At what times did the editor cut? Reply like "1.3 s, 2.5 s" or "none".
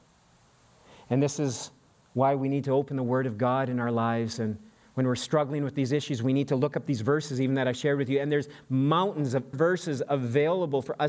9.5 s